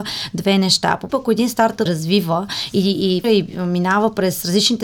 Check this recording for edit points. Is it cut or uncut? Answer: cut